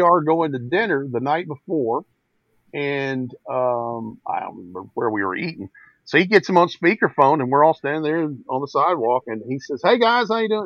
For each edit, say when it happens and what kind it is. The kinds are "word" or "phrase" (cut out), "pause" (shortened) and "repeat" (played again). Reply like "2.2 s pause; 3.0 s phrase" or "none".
none